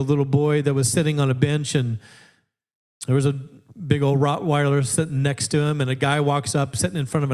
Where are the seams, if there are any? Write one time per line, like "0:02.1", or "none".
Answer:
none